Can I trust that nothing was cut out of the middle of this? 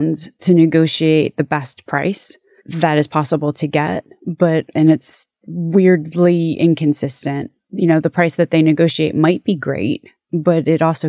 yes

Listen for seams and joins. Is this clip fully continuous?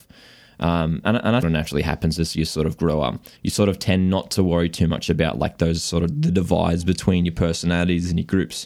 no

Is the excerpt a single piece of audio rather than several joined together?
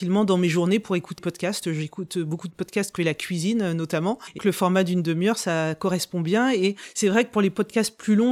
no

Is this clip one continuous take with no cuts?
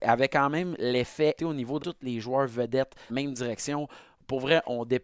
no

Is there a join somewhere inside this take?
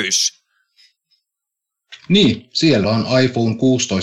yes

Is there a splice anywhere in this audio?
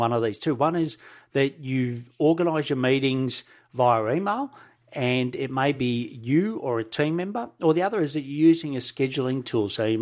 no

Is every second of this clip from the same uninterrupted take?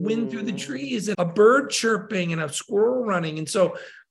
no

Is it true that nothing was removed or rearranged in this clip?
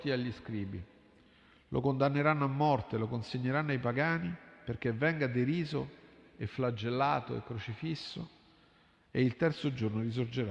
yes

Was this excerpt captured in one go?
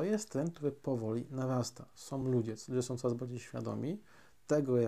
yes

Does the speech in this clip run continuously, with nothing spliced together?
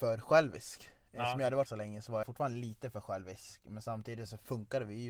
no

